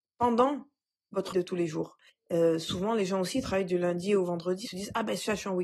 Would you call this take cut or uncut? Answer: cut